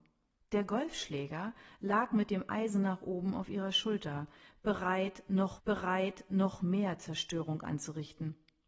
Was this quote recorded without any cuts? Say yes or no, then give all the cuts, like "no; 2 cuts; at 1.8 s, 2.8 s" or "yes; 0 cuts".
no; 1 cut; at 5.6 s